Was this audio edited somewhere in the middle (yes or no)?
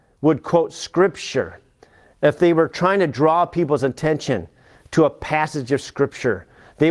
no